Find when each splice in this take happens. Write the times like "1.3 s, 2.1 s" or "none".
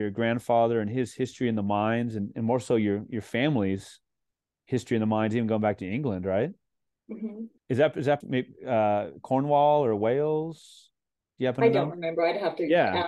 7.6 s, 8.2 s